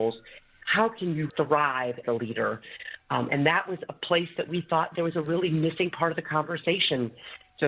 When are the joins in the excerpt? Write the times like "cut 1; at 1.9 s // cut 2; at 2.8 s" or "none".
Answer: cut 1; at 1.3 s // cut 2; at 2.0 s